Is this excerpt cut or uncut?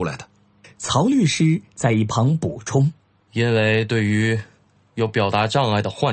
uncut